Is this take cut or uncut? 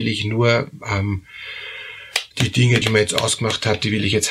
cut